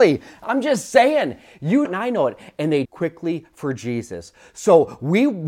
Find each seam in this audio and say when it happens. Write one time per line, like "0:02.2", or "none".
0:01.9
0:02.9